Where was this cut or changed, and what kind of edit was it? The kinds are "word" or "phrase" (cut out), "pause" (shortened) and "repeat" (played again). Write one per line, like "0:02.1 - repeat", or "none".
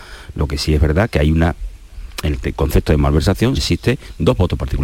0:03.6 - word